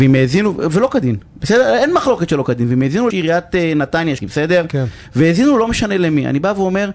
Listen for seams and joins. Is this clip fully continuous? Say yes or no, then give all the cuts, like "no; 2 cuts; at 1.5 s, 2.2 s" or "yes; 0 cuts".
no; 2 cuts; at 3.1 s, 4.2 s